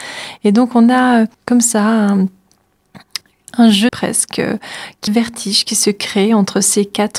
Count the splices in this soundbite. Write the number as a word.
three